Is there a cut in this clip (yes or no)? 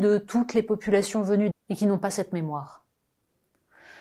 yes